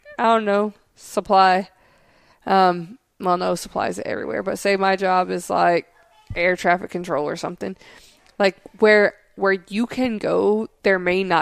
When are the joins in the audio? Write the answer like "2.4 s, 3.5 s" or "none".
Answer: none